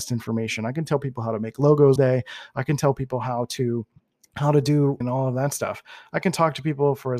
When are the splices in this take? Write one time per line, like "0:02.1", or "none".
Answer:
0:02.0
0:04.0
0:05.0